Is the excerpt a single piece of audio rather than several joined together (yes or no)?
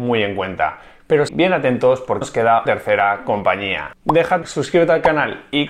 no